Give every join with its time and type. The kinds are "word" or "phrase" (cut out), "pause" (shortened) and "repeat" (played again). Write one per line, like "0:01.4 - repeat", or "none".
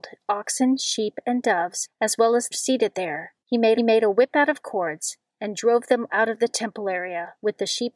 0:02.5 - phrase
0:03.4 - pause
0:03.7 - repeat
0:06.1 - word